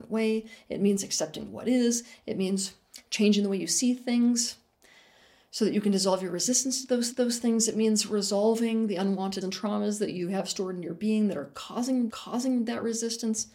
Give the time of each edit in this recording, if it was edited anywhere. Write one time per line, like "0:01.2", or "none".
0:07.1
0:09.4
0:12.1